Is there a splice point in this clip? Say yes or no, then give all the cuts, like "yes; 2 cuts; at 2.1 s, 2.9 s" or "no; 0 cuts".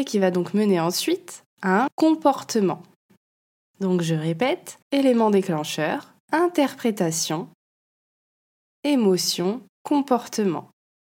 yes; 4 cuts; at 1.9 s, 4.8 s, 6.2 s, 9.7 s